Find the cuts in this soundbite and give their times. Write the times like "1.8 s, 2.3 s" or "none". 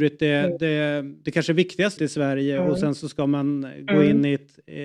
2.0 s